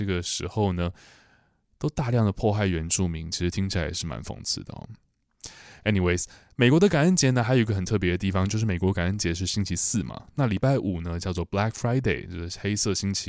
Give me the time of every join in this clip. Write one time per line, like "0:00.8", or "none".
none